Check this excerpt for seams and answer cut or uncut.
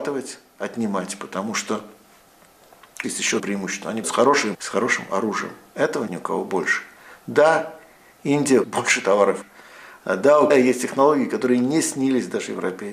cut